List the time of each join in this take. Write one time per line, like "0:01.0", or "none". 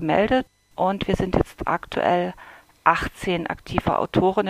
none